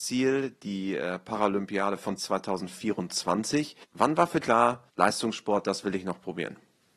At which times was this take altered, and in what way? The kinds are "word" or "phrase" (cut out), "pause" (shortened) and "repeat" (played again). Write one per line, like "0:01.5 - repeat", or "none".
0:02.2 - word
0:03.8 - pause
0:04.4 - word
0:04.9 - pause